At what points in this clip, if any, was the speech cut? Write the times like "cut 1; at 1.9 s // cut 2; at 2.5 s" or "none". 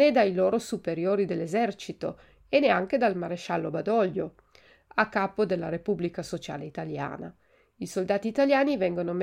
none